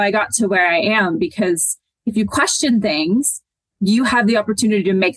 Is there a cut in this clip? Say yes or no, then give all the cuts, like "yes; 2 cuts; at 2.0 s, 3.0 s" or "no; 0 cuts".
no; 0 cuts